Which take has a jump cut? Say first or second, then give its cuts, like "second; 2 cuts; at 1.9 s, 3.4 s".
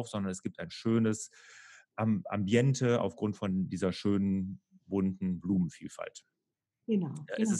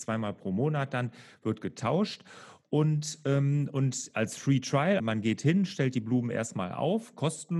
second; 1 cut; at 5.0 s